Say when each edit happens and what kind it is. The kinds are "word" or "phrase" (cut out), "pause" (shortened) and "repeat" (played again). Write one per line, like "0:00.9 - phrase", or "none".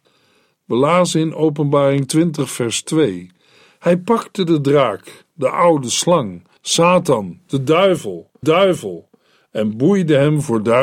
0:06.6 - pause
0:08.4 - repeat